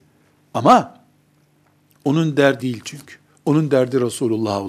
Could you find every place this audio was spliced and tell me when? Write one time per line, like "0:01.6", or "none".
0:02.6